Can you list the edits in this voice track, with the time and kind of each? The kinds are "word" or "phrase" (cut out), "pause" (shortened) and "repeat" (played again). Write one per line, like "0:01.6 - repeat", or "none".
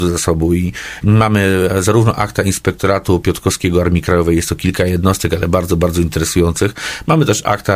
none